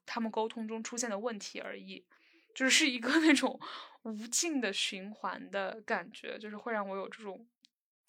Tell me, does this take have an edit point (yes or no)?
no